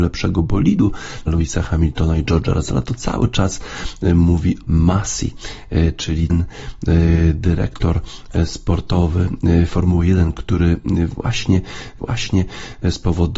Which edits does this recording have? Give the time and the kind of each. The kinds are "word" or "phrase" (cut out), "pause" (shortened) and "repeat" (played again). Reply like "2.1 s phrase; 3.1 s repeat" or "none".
1.3 s word; 4.7 s phrase; 6.3 s word; 12.0 s repeat